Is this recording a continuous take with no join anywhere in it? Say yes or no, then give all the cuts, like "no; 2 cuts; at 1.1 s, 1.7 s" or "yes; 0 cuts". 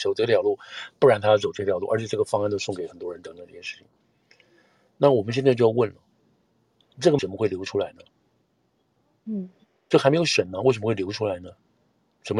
no; 1 cut; at 7.2 s